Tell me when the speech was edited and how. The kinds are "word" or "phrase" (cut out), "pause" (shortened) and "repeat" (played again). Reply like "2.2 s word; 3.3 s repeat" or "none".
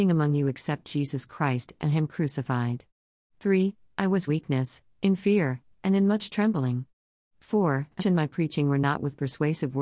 4.3 s phrase; 8.0 s phrase